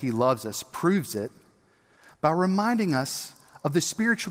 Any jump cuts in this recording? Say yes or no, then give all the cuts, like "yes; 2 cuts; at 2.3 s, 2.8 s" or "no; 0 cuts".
no; 0 cuts